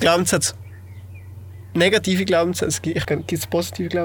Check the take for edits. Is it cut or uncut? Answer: cut